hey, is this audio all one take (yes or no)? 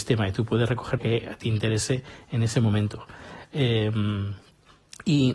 no